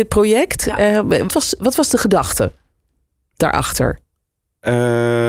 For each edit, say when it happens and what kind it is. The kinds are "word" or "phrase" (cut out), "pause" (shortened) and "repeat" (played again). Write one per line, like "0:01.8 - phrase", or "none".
0:01.3 - word